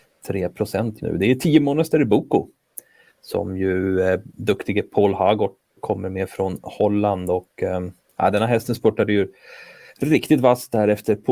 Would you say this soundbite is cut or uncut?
cut